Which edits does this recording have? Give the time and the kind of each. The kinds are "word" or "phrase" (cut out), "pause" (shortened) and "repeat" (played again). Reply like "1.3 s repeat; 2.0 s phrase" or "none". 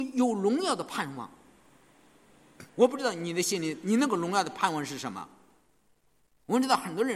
2.7 s pause

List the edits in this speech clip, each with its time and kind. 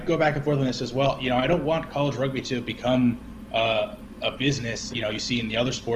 4.9 s word

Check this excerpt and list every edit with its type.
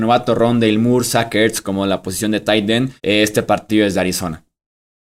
3.0 s pause

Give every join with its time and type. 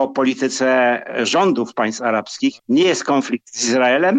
2.6 s pause

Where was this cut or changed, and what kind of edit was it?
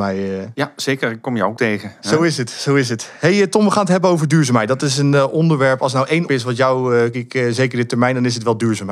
1.6 s phrase; 6.3 s word; 7.1 s phrase

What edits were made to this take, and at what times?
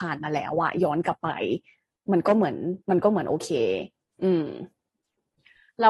2.8 s pause

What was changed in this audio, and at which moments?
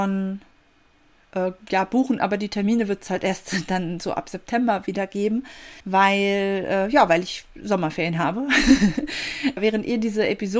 5.8 s pause

